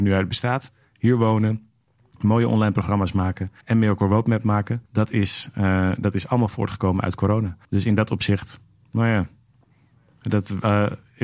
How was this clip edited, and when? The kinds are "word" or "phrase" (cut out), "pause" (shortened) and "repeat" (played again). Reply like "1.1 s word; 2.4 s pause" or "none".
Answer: 3.6 s pause; 4.9 s pause; 7.6 s pause